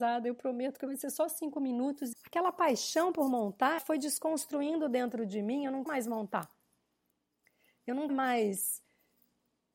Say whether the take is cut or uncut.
cut